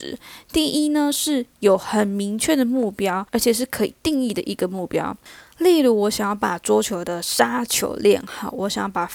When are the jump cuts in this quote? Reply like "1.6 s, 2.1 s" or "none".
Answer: 3.3 s

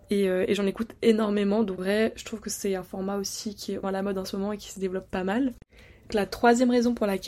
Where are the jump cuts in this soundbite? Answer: 1.8 s, 3.8 s, 6.1 s

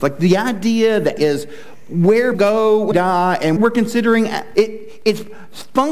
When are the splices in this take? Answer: 1.2 s, 2.3 s, 2.9 s, 3.6 s, 4.5 s

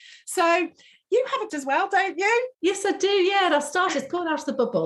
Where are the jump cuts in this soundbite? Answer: 1.5 s, 2.5 s

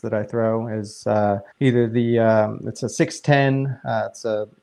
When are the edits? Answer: 1.5 s

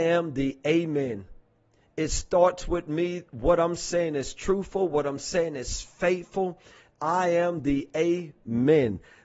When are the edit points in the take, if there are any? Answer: none

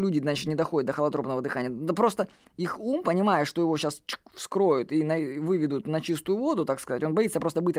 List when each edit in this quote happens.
none

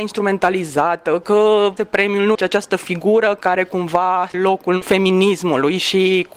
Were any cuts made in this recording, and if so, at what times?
1.8 s, 2.3 s, 4.3 s

